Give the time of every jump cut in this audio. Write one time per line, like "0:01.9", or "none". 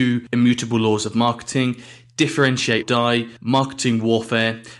0:02.8
0:03.4